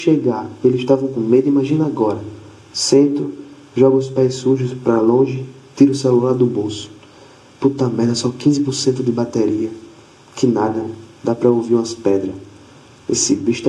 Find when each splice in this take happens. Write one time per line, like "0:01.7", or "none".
none